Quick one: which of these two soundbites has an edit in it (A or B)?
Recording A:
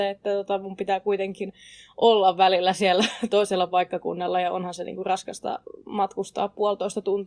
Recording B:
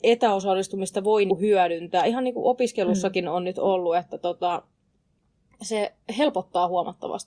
B